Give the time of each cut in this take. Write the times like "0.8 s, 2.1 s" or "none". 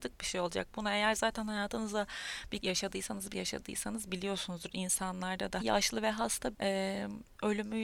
2.6 s, 3.3 s, 5.6 s, 6.5 s